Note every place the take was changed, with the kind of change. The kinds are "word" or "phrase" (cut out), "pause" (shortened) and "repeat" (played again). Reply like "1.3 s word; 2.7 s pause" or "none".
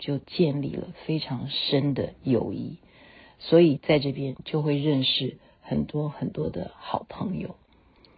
none